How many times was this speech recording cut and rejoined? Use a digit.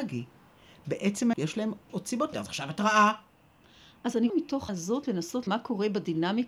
6